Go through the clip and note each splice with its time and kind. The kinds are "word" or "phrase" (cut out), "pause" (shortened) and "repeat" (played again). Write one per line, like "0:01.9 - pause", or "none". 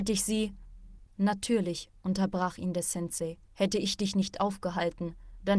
0:01.1 - pause
0:03.4 - pause